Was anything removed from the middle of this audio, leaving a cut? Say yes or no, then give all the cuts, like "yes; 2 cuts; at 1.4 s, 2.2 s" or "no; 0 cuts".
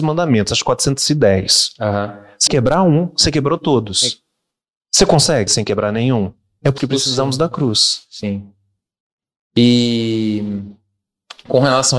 yes; 3 cuts; at 2.5 s, 5.5 s, 6.8 s